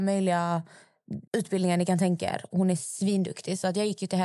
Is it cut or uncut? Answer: cut